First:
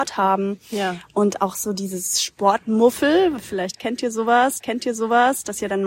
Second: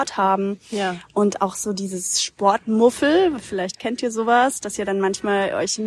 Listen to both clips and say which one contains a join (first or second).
first